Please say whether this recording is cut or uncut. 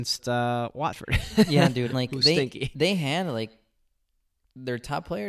cut